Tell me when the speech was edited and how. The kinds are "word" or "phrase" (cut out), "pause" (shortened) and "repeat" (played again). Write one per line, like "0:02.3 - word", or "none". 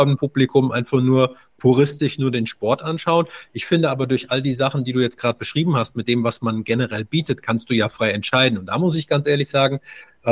none

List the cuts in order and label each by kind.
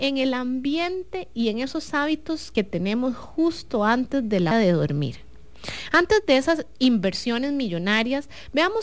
0:02.5 - word
0:04.5 - word

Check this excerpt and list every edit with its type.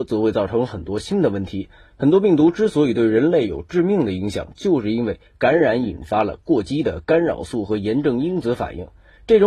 none

